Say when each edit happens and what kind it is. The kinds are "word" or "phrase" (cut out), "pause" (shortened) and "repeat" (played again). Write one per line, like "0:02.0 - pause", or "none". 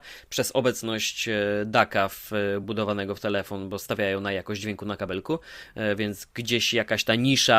none